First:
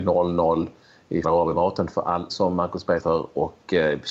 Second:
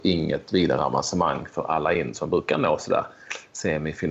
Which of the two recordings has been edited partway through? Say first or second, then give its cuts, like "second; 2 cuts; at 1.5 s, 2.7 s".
first; 3 cuts; at 1.2 s, 2.3 s, 3.0 s